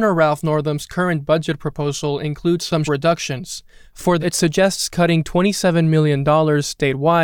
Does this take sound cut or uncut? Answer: cut